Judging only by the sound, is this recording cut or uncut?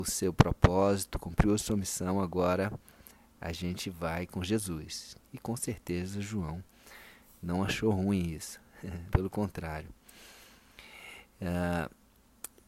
cut